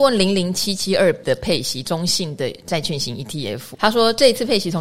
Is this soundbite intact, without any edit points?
no; 2 cuts; at 1.2 s, 3.7 s

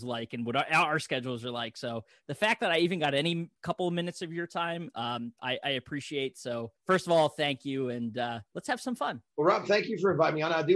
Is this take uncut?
no; 4 cuts; at 3.6 s, 6.8 s, 8.5 s, 9.3 s

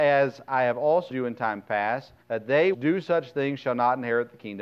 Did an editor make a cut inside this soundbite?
yes; 3 cuts; at 1.1 s, 2.2 s, 2.7 s

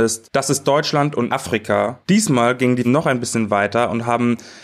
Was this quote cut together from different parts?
yes; 3 cuts; at 1.3 s, 2.0 s, 2.8 s

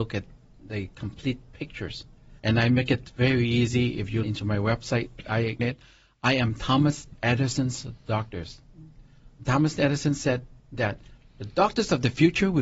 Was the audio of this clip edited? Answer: yes; 5 cuts; at 2.4 s, 4.2 s, 5.6 s, 9.3 s, 10.6 s

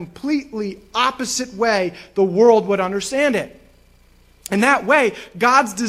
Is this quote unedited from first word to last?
yes; 0 cuts

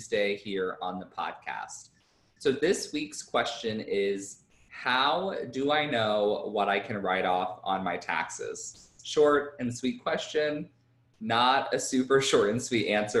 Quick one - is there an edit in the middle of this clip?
no; 0 cuts

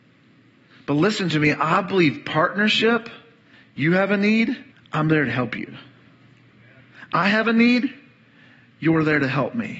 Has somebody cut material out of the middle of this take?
yes; 2 cuts; at 3.5 s, 4.7 s

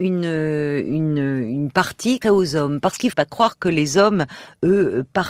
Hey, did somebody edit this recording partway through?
yes; 2 cuts; at 2.2 s, 3.1 s

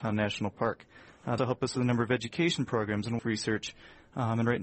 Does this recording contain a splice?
yes; 2 cuts; at 1.4 s, 3.2 s

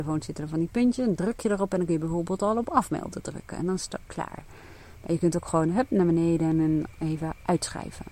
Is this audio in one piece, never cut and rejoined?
yes; 0 cuts

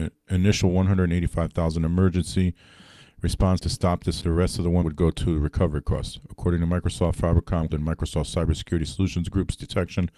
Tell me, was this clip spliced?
yes; 4 cuts; at 3.6 s, 4.2 s, 4.8 s, 7.7 s

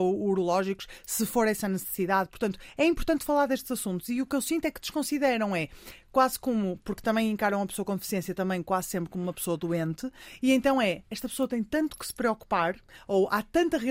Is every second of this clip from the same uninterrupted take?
yes; 0 cuts

